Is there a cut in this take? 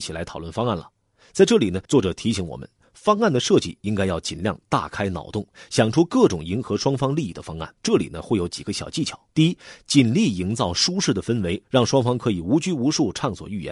yes; 3 cuts; at 1.8 s, 7.8 s, 9.3 s

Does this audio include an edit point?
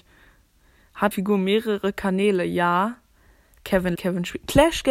yes; 2 cuts; at 1.1 s, 3.9 s

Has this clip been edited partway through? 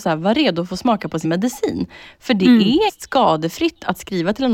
yes; 2 cuts; at 1.2 s, 2.9 s

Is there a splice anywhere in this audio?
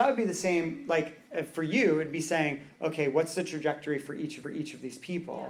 yes; 1 cut; at 4.4 s

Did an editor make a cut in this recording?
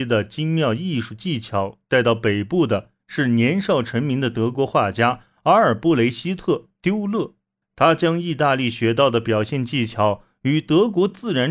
yes; 1 cut; at 7.6 s

